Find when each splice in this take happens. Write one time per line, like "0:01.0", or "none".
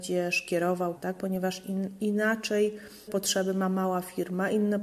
0:01.0
0:03.1

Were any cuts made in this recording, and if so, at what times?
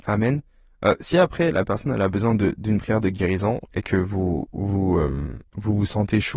0:05.5

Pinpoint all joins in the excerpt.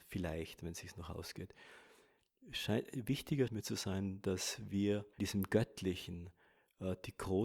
0:03.5
0:05.2

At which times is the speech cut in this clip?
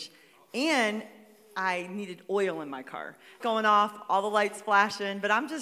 0:03.4

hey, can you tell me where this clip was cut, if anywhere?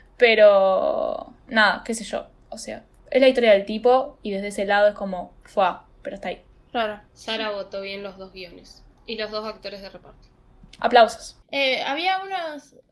0:01.4
0:05.9
0:07.1
0:11.4

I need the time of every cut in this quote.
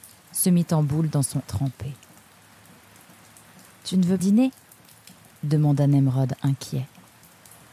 0:01.4
0:04.2

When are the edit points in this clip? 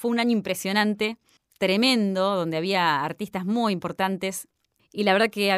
none

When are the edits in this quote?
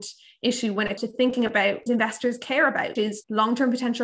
0:01.0
0:01.9
0:03.0

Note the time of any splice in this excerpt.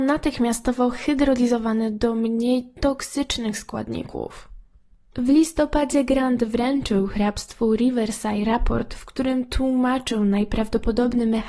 none

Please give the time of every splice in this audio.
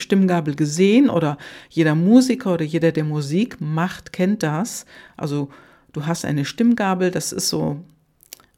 none

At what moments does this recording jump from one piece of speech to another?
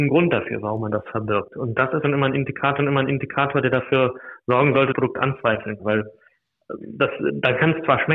0:02.0
0:02.8
0:04.9
0:05.8

